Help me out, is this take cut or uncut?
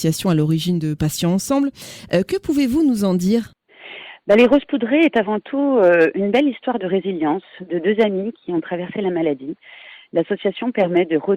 uncut